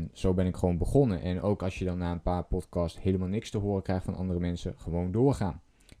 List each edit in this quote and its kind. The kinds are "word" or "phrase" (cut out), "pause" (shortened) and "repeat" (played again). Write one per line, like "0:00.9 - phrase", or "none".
none

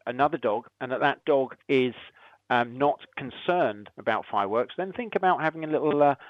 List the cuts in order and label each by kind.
0:01.6 - pause

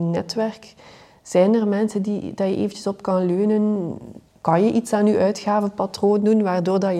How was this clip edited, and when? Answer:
0:04.3 - pause

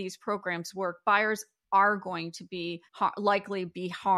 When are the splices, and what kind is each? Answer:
0:02.9 - pause

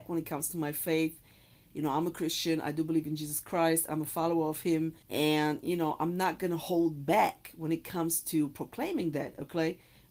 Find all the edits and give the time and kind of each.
0:05.0 - pause

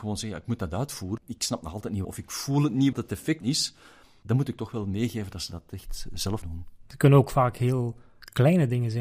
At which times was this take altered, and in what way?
0:01.2 - word
0:02.0 - word
0:02.9 - word
0:03.4 - word
0:06.4 - word

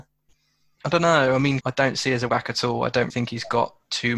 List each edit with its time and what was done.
0:01.6 - word
0:02.3 - word
0:03.1 - word

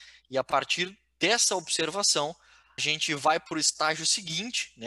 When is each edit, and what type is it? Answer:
0:02.8 - word

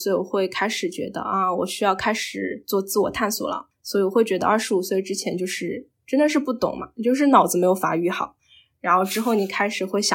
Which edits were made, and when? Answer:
none

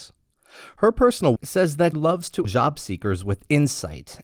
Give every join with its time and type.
0:01.4 - word
0:01.9 - word
0:02.4 - word

